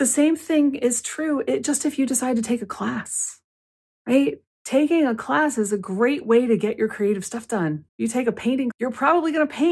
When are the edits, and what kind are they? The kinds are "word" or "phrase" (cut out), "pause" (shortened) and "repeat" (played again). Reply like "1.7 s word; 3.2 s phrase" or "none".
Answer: 3.6 s pause; 7.9 s pause; 8.7 s word